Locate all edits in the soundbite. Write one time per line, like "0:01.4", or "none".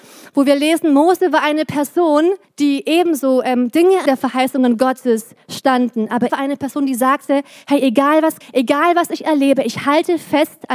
0:02.4
0:04.1
0:06.3
0:08.4